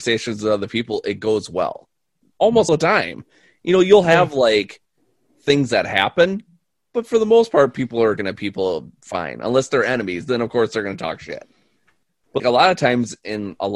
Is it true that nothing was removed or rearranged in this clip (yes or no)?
no